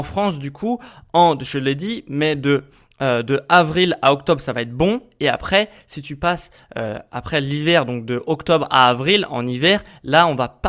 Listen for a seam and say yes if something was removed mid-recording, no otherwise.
no